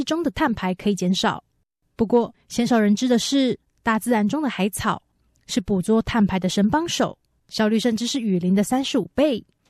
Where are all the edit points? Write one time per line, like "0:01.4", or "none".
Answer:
none